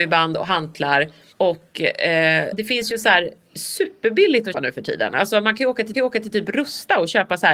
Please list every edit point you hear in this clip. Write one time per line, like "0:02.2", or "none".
0:01.3
0:02.5
0:04.5
0:05.9